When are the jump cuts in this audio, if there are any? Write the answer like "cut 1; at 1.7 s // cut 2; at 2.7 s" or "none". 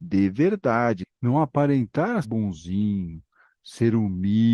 cut 1; at 1.1 s // cut 2; at 2.2 s